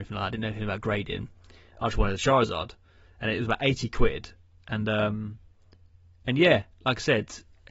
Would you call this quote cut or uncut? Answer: uncut